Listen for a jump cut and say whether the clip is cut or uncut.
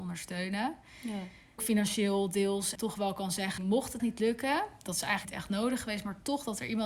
cut